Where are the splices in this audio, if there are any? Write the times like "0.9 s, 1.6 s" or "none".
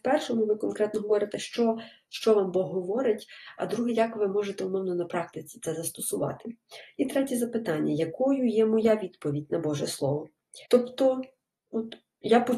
10.7 s